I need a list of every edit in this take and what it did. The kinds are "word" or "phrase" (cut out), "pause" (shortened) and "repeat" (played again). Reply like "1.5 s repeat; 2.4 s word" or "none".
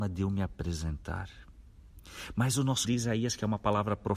2.8 s word